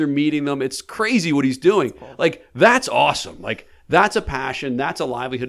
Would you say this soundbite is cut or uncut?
uncut